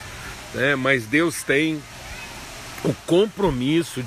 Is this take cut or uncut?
uncut